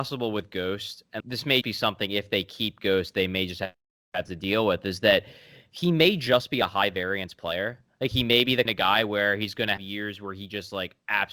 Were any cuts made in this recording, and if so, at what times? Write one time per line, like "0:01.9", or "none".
0:01.2
0:01.6
0:08.7
0:09.8